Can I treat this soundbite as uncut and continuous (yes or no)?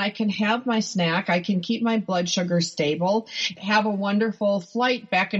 no